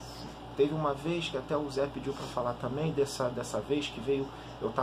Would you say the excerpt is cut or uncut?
uncut